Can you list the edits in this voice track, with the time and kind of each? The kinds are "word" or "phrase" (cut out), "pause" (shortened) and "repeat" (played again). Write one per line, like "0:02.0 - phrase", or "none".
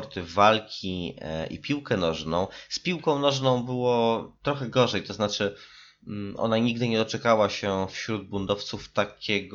0:04.4 - pause